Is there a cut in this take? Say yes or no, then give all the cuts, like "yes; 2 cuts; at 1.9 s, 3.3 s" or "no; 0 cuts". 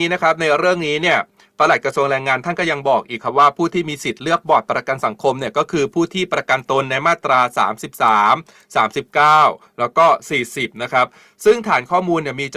no; 0 cuts